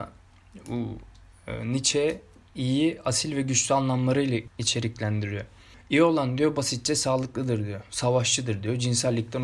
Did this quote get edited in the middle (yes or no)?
no